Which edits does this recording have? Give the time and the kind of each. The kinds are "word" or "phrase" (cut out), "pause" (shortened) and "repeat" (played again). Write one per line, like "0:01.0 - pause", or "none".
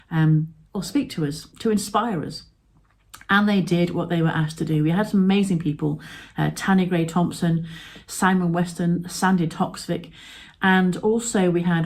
0:01.5 - pause